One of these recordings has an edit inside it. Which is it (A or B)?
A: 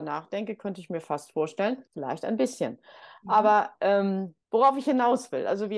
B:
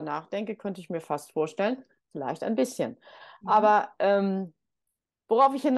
A